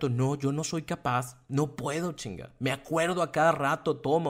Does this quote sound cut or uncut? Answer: uncut